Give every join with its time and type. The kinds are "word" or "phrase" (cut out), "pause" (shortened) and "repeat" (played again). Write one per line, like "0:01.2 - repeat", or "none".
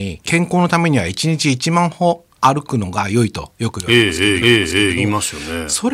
0:04.4 - repeat